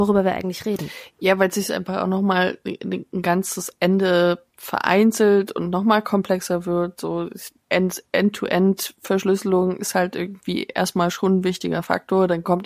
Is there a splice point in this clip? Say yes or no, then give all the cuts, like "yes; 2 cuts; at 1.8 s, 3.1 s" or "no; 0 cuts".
yes; 1 cut; at 4.5 s